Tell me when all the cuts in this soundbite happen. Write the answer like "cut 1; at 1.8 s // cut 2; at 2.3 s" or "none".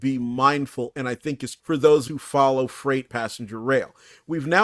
cut 1; at 0.9 s // cut 2; at 1.6 s // cut 3; at 2.1 s // cut 4; at 3.1 s